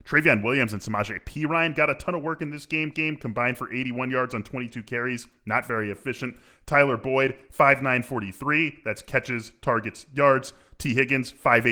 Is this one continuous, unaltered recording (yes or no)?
no